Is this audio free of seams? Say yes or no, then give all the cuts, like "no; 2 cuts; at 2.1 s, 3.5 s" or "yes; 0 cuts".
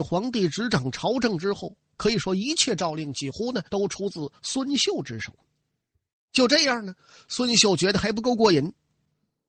no; 1 cut; at 3.7 s